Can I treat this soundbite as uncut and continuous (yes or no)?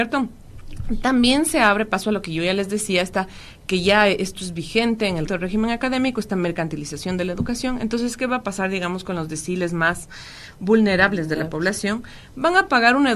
no